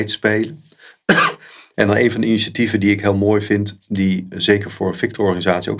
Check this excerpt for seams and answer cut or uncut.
uncut